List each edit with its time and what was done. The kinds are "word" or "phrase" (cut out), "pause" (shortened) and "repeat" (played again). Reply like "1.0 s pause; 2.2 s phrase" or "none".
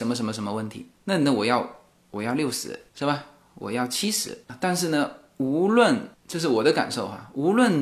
2.9 s pause